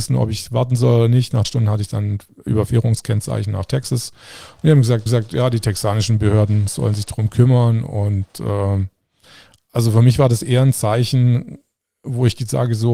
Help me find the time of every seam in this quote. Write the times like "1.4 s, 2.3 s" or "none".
1.4 s, 5.1 s

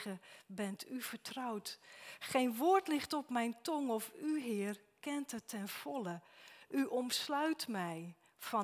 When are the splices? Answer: none

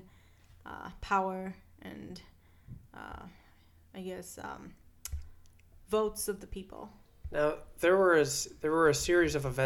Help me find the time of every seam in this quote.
none

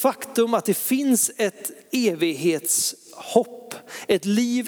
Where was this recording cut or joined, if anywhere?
1.8 s

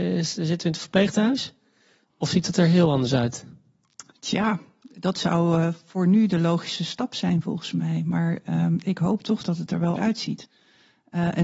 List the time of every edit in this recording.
10.0 s

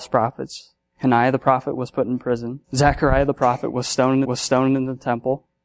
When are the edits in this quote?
2.6 s, 4.2 s

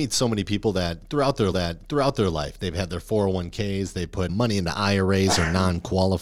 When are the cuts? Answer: 1.5 s, 4.3 s

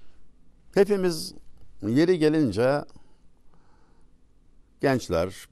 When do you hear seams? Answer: none

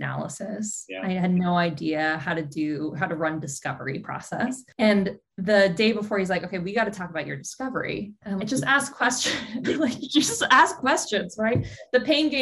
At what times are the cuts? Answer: 8.4 s

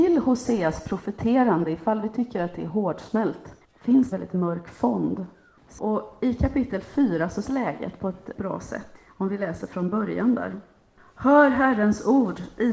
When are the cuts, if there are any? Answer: 3.6 s, 4.1 s, 7.4 s, 8.4 s

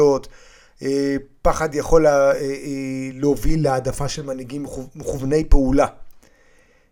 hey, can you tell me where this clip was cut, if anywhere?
none

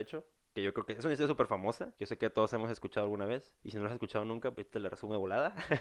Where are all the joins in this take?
1.9 s, 3.6 s, 4.5 s

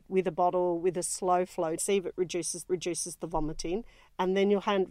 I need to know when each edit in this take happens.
1.8 s, 2.7 s

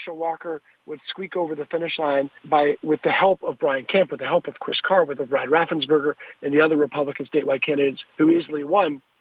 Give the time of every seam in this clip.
2.4 s, 5.2 s, 8.1 s

